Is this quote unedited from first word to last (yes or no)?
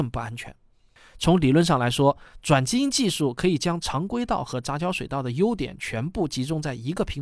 yes